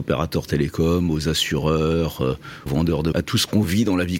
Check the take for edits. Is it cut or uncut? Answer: cut